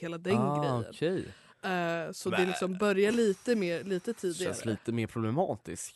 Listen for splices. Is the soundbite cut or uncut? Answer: uncut